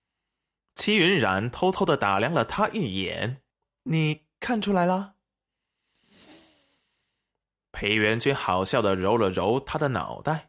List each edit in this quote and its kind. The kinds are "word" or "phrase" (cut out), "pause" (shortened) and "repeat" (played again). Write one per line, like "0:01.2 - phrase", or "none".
0:03.5 - pause